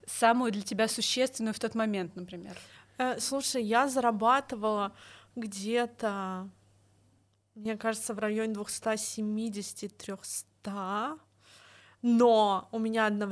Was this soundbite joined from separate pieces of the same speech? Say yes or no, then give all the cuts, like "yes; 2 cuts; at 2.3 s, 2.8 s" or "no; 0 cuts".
no; 0 cuts